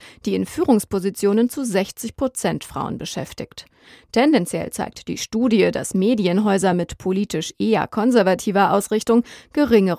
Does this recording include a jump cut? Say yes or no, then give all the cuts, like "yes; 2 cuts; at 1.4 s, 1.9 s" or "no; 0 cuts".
no; 0 cuts